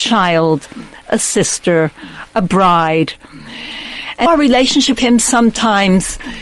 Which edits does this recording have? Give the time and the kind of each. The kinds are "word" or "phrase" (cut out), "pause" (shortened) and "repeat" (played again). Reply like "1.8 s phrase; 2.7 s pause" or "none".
4.3 s word; 5.0 s word